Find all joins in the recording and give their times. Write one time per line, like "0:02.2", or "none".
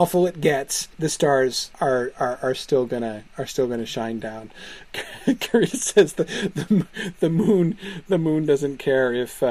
0:00.9
0:01.7